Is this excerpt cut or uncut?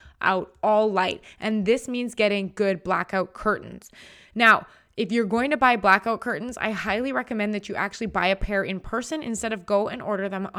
uncut